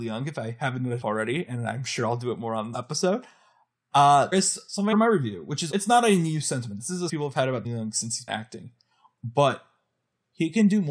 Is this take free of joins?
no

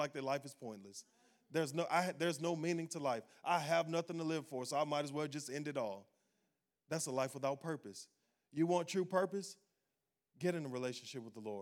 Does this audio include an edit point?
no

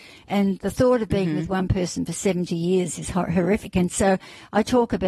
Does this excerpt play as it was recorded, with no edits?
yes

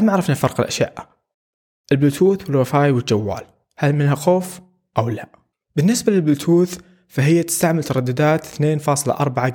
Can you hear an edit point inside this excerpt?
no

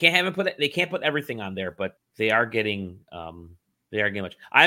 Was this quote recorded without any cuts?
no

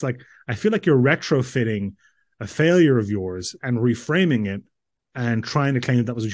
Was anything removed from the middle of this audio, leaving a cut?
no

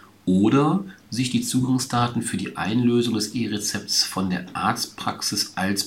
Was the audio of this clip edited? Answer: no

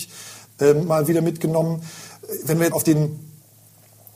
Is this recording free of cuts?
no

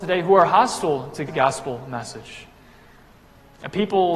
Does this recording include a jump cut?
yes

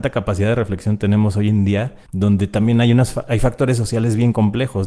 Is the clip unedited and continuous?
no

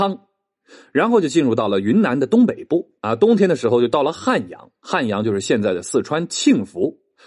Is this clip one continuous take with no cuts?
no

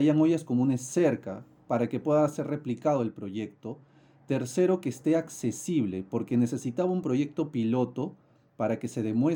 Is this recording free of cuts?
yes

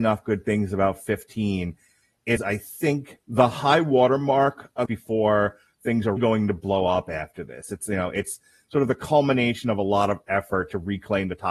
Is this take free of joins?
no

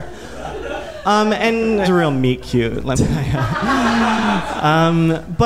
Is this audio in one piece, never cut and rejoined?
no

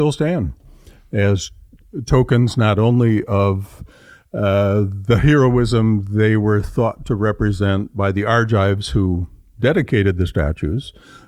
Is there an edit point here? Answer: no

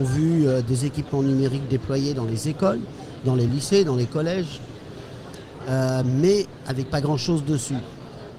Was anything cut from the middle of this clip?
no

